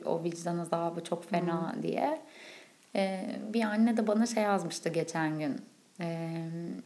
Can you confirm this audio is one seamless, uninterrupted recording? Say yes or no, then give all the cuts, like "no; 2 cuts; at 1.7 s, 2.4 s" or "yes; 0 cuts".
yes; 0 cuts